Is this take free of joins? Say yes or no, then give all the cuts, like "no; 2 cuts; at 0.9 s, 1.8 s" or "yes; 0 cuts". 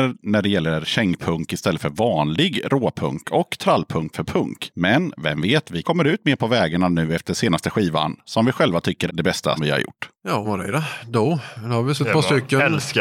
no; 6 cuts; at 4.1 s, 5.8 s, 9.1 s, 9.6 s, 10.4 s, 12.0 s